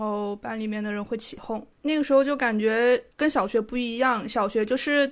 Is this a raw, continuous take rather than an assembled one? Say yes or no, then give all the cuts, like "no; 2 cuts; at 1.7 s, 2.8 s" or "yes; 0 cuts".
no; 1 cut; at 3.1 s